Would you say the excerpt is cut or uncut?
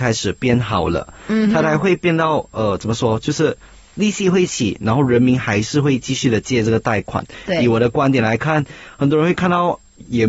uncut